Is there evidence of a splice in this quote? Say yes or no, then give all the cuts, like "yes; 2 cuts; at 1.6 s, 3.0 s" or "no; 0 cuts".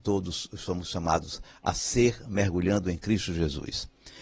no; 0 cuts